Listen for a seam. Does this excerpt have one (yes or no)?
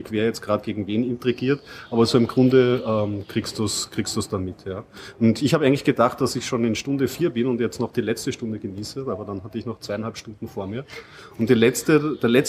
no